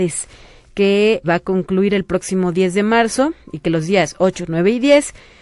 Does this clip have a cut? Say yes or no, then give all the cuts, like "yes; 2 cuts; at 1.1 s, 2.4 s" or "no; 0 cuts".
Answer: yes; 1 cut; at 1.2 s